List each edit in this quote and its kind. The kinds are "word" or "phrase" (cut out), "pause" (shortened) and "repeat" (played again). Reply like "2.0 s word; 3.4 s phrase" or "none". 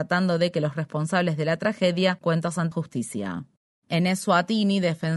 2.2 s word; 2.7 s word